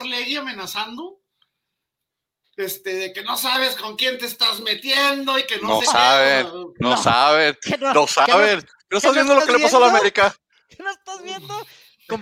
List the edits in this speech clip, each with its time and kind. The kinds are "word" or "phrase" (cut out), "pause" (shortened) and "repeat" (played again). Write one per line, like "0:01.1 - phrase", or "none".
none